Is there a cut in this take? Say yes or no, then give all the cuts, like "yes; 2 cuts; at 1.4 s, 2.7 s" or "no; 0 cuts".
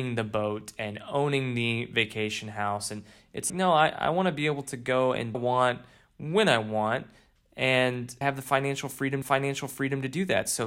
yes; 4 cuts; at 3.5 s, 5.3 s, 8.2 s, 9.2 s